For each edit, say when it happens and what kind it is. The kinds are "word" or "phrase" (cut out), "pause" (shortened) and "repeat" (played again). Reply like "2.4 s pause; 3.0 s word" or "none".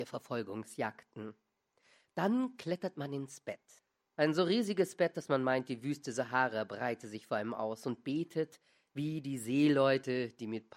3.8 s pause